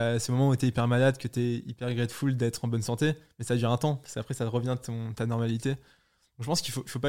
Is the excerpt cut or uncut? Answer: uncut